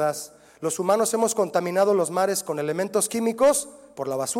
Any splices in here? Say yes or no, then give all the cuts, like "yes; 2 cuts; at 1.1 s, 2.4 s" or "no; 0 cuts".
no; 0 cuts